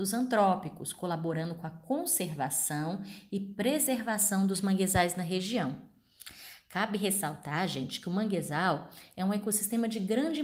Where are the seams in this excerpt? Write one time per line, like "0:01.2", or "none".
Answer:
none